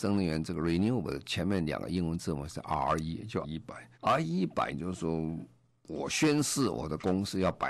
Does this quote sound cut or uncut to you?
cut